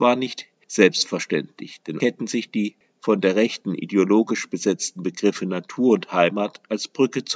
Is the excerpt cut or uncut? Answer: cut